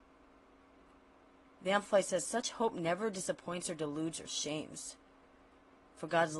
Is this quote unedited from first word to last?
yes; 0 cuts

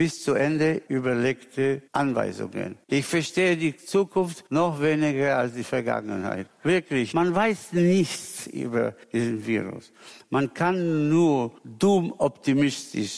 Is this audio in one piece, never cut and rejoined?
no; 4 cuts; at 2.8 s, 4.5 s, 9.0 s, 11.6 s

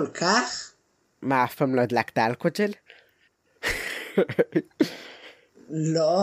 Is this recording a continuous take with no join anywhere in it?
yes; 0 cuts

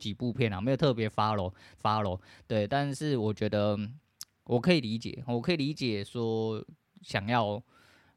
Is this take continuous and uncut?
no; 1 cut; at 1.8 s

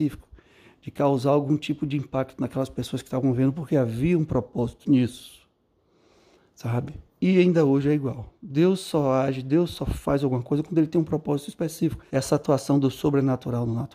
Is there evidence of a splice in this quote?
yes; 2 cuts; at 7.1 s, 12.1 s

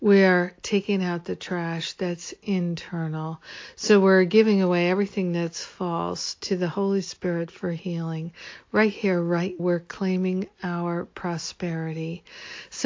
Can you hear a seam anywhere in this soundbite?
yes; 1 cut; at 9.6 s

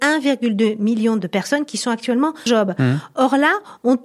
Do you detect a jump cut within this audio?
yes; 1 cut; at 2.5 s

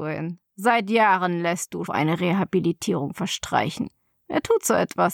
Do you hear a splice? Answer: yes; 1 cut; at 1.9 s

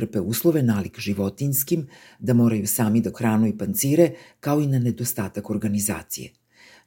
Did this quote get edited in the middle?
yes; 1 cut; at 3.1 s

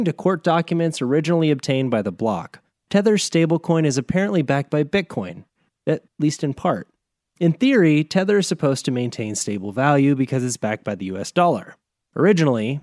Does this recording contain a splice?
no; 0 cuts

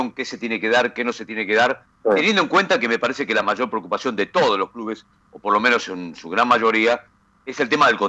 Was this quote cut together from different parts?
no; 0 cuts

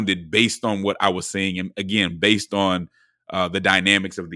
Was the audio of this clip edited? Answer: no; 0 cuts

